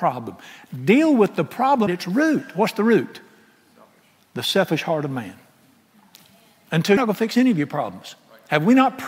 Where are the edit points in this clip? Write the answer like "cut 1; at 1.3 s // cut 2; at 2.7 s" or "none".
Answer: cut 1; at 1.9 s // cut 2; at 7.0 s